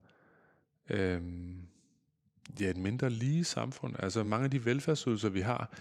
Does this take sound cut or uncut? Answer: uncut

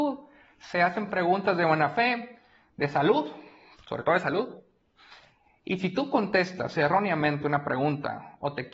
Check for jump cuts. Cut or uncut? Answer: uncut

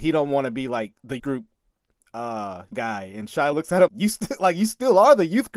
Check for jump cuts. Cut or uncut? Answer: cut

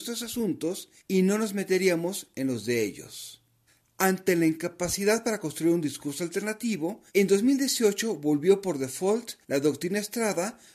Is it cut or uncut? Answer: cut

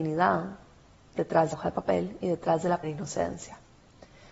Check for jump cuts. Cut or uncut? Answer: cut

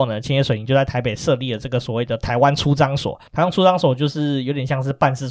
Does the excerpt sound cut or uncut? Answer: cut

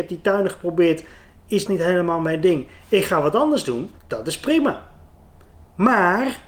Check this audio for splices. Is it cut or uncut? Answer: cut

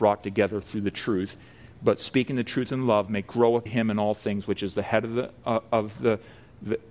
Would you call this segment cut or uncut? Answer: cut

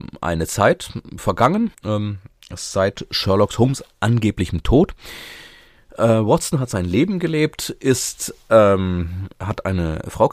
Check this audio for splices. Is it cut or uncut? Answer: cut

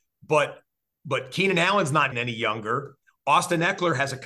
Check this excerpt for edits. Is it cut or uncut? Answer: cut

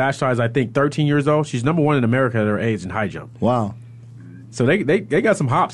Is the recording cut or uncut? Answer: uncut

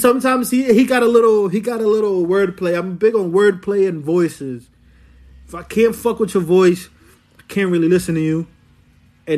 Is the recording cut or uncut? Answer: uncut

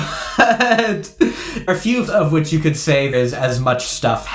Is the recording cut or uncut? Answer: cut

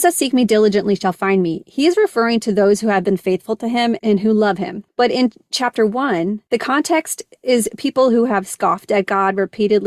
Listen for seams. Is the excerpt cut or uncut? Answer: uncut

